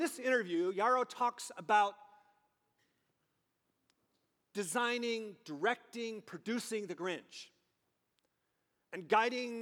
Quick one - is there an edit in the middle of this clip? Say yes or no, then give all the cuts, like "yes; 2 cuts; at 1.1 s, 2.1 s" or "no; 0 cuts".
no; 0 cuts